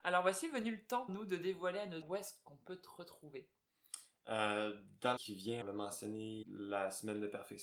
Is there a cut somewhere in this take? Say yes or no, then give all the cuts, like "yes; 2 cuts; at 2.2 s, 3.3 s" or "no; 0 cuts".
yes; 5 cuts; at 1.1 s, 2.0 s, 5.2 s, 5.6 s, 6.4 s